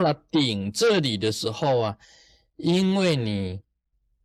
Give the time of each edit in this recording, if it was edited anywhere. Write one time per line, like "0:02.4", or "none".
none